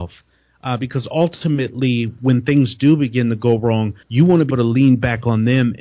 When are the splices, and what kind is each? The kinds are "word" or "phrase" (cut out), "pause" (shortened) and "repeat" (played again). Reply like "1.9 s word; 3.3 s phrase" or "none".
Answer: 4.0 s pause; 4.5 s word